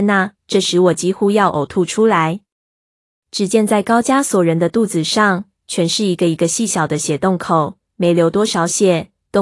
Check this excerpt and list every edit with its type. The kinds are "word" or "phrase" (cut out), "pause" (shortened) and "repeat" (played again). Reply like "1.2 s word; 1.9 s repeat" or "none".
none